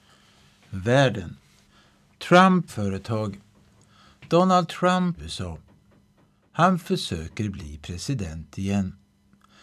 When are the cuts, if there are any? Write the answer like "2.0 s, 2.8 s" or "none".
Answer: 2.7 s, 5.2 s